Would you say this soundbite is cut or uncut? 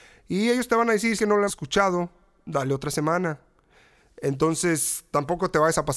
cut